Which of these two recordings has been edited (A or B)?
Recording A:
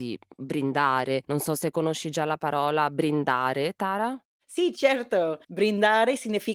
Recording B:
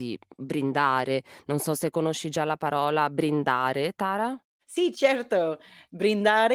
A